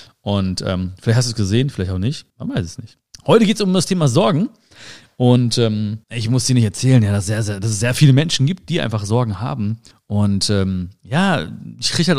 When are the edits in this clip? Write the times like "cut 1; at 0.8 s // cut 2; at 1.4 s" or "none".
cut 1; at 2.3 s // cut 2; at 3.1 s // cut 3; at 6.0 s // cut 4; at 9.9 s